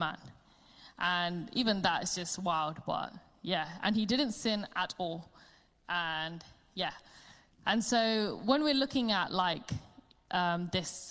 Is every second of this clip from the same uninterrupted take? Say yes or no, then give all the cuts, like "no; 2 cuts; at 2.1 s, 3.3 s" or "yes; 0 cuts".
yes; 0 cuts